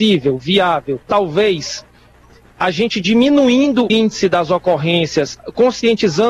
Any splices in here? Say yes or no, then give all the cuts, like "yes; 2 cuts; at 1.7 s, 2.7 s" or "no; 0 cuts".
yes; 2 cuts; at 1.0 s, 3.9 s